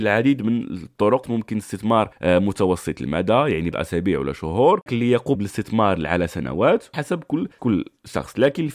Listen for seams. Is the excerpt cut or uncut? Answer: cut